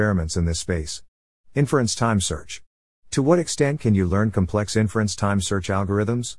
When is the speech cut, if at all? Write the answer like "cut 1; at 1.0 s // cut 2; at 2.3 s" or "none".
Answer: none